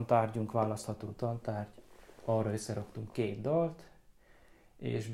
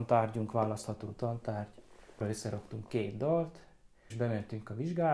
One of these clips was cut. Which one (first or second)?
second